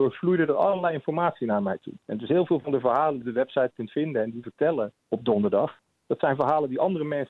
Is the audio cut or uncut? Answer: cut